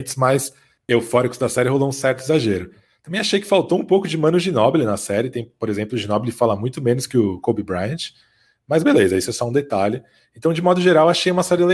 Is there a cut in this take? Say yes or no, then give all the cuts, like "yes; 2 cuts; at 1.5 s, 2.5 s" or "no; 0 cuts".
no; 0 cuts